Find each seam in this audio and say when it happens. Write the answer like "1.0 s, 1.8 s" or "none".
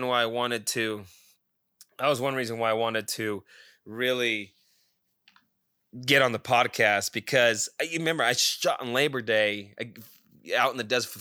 none